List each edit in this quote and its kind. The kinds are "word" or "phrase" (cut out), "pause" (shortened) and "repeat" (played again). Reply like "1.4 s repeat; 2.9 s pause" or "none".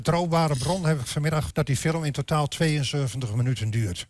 1.5 s word